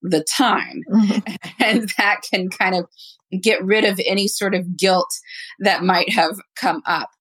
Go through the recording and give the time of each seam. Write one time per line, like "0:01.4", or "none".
none